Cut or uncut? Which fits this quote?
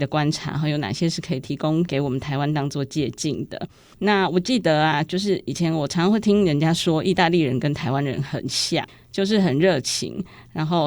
uncut